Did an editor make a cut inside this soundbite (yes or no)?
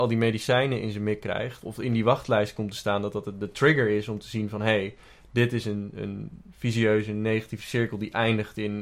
yes